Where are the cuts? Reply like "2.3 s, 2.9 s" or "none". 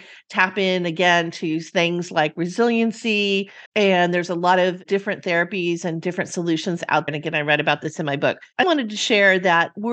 3.7 s, 7.1 s, 8.6 s